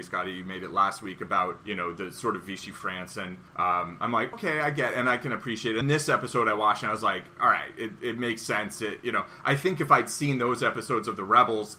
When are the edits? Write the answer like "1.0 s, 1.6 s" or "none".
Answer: 1.6 s, 3.5 s, 4.3 s, 5.8 s